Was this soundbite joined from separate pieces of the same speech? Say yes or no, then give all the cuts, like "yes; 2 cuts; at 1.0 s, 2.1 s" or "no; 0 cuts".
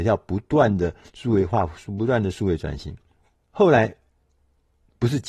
no; 0 cuts